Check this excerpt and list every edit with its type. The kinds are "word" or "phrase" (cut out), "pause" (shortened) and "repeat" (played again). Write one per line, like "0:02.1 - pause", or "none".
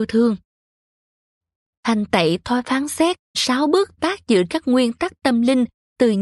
0:03.3 - phrase
0:04.0 - word
0:04.5 - word